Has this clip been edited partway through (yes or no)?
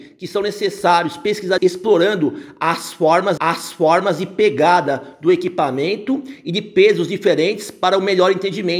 yes